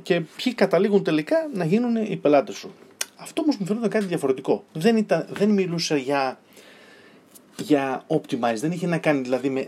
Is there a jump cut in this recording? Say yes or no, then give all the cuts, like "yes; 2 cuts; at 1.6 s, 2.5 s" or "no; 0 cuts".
yes; 2 cuts; at 4.7 s, 7.4 s